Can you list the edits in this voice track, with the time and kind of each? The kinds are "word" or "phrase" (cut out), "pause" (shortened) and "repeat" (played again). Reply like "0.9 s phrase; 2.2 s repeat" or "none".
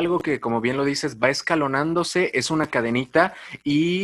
none